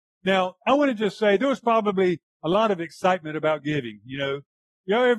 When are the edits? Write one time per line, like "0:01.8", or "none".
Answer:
0:02.3

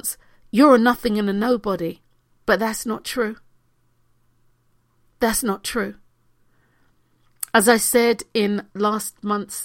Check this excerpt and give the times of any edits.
0:08.7

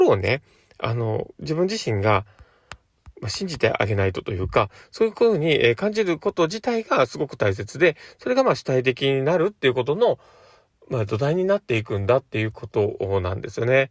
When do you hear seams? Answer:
none

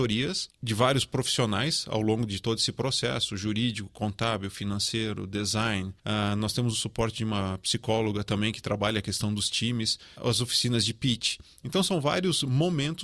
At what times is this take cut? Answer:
0:10.1

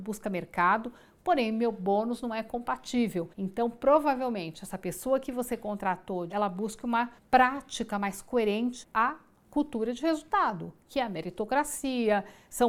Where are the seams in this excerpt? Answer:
0:03.3
0:06.3
0:07.2
0:08.8

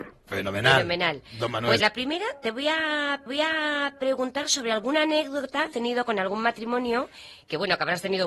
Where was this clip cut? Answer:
0:01.8
0:03.3
0:05.7

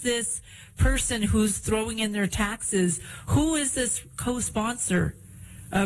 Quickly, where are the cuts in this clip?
none

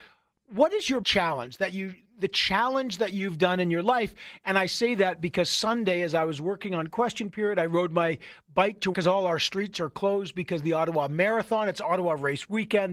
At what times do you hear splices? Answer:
0:01.0
0:02.0
0:08.9

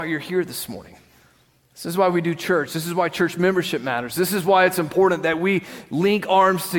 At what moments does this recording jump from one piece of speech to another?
none

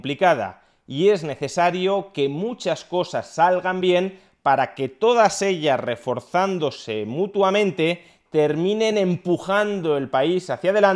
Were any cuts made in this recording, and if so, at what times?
none

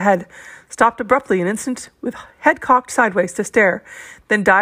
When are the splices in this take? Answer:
none

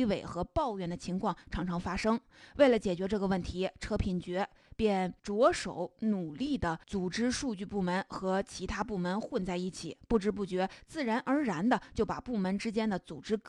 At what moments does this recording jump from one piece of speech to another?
0:05.2
0:06.8

